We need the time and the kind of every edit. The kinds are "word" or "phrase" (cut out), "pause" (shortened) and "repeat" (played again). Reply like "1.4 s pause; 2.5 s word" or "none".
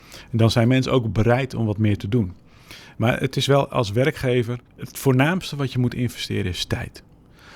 4.7 s pause